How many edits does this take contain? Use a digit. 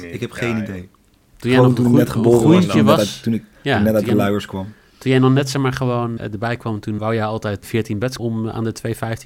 4